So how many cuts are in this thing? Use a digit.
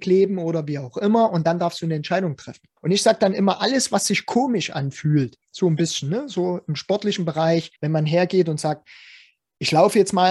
3